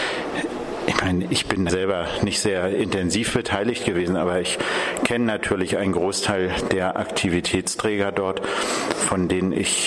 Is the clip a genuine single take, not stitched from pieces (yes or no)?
no